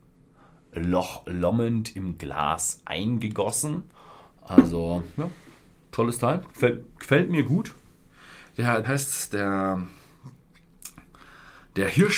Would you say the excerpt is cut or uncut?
cut